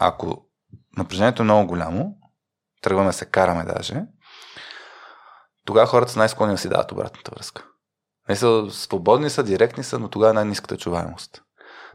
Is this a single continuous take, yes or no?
yes